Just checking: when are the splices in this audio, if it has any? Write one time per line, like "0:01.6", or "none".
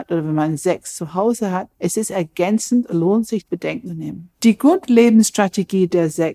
0:01.7
0:02.9
0:03.4
0:03.9
0:04.3